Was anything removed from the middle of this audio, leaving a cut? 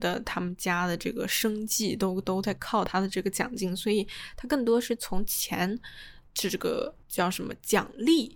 yes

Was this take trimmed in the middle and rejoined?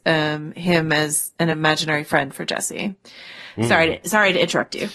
no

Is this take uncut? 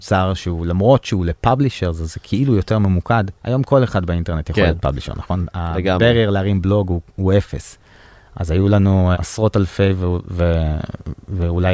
no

